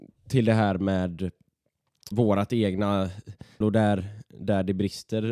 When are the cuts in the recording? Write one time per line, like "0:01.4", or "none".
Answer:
0:02.1
0:03.6